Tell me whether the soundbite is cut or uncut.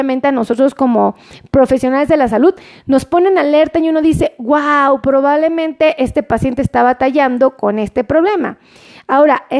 uncut